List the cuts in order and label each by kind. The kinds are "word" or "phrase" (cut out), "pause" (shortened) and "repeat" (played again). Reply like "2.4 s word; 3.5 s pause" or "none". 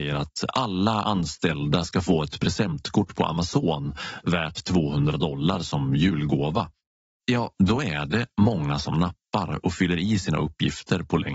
7.5 s pause